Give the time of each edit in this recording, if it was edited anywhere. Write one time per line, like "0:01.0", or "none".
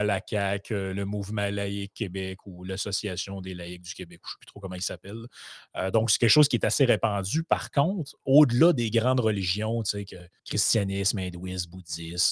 0:10.4